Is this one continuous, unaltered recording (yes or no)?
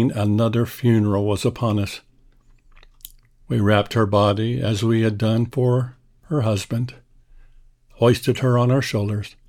yes